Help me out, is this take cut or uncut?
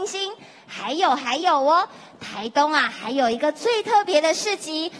uncut